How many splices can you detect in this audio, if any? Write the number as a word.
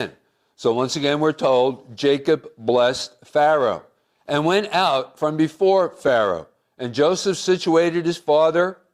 zero